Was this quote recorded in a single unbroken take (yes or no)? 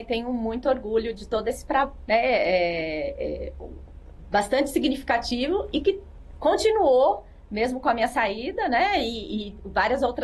no